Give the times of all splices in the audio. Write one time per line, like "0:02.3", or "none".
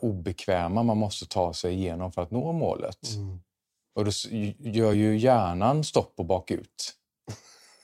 none